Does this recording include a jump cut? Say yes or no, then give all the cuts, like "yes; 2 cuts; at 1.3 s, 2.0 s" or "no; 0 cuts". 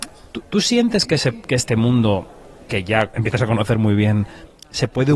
yes; 1 cut; at 3.1 s